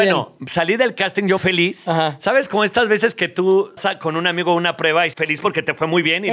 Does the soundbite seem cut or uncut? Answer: cut